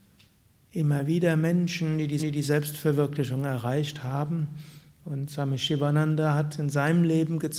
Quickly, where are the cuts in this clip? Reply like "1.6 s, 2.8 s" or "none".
2.2 s